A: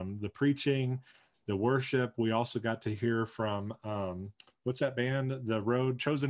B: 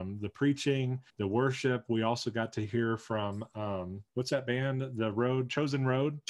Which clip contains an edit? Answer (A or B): B